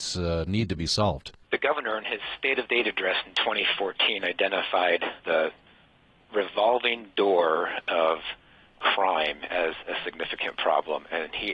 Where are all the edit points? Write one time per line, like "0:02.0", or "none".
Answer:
0:01.4
0:02.7
0:05.2

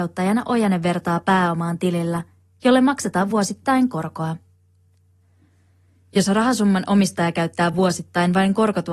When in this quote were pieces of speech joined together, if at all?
none

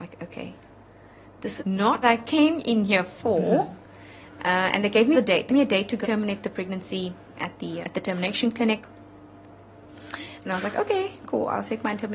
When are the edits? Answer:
0:01.6
0:02.0
0:05.1
0:05.5
0:06.0
0:07.4
0:07.8

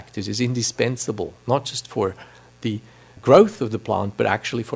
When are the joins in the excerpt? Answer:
0:03.2

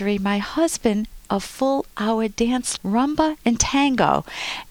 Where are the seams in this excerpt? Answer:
0:01.3
0:02.8

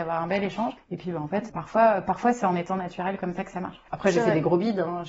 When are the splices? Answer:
none

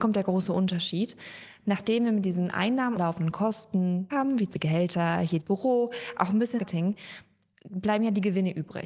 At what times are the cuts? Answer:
0:03.0
0:04.1
0:04.5
0:05.4
0:06.6

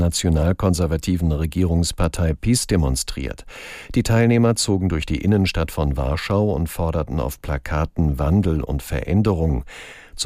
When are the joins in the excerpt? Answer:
none

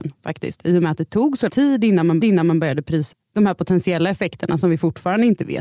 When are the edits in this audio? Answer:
0:01.5
0:02.2
0:03.1

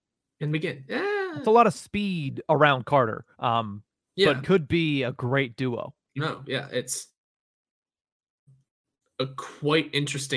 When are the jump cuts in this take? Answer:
0:03.3
0:04.4
0:06.2

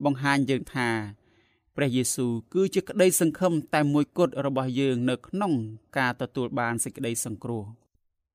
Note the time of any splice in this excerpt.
none

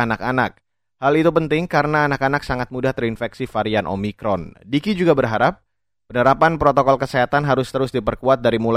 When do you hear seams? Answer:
none

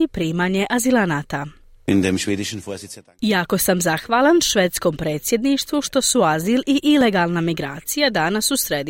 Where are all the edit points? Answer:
none

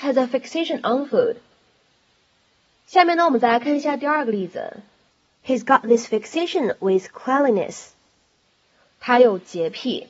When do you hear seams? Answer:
none

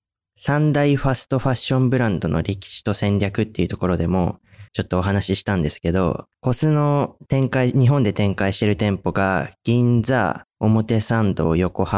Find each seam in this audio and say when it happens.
0:04.7
0:06.3
0:10.5

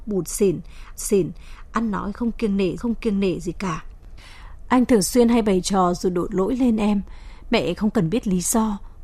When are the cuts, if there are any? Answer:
0:01.0
0:02.8

